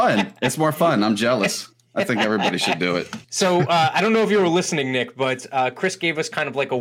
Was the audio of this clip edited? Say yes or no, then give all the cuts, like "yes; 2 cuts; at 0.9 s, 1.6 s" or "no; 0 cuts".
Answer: yes; 1 cut; at 3.2 s